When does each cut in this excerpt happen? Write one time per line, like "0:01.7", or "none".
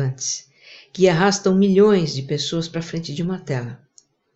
none

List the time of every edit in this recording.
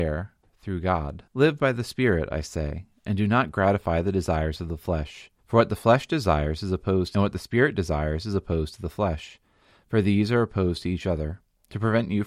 0:01.3
0:05.4
0:07.1

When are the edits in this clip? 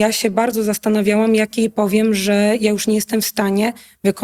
none

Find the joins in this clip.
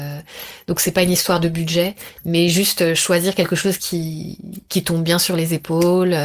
none

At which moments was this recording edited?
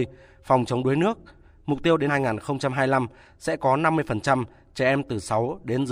0:02.1

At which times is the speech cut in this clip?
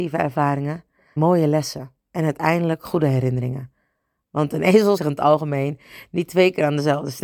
0:01.2
0:02.0
0:05.0

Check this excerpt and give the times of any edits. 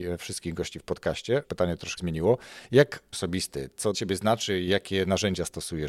0:01.4
0:02.0
0:03.1
0:03.9

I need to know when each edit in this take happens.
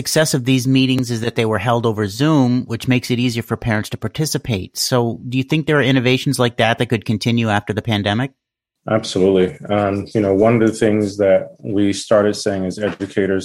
none

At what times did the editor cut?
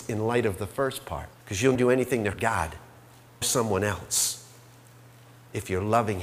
0:01.3
0:01.7
0:02.3
0:03.4

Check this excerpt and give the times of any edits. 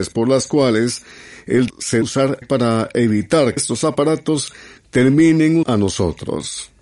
0:01.7
0:02.0
0:02.4
0:03.6
0:05.6

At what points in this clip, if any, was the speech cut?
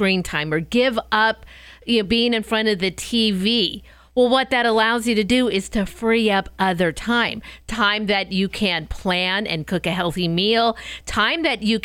none

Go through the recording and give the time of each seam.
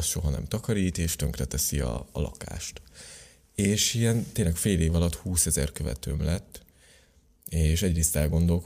none

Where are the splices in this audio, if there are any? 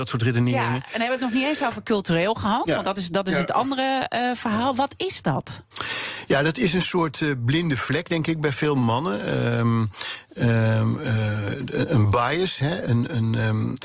none

